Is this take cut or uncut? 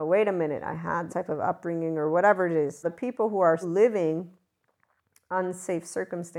cut